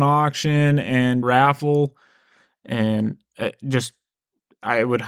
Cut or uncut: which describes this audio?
cut